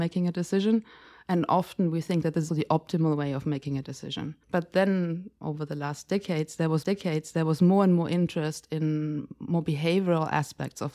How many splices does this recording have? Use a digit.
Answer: 4